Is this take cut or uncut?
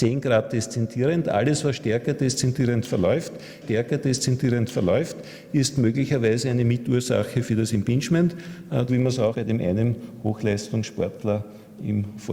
cut